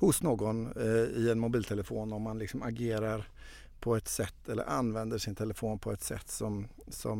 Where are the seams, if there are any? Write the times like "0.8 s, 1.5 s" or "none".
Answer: none

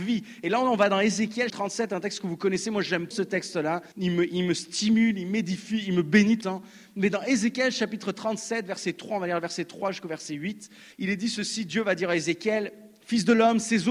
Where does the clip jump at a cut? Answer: 1.5 s, 3.1 s, 3.9 s, 6.4 s, 10.9 s

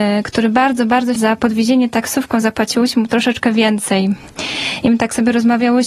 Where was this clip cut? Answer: 1.2 s

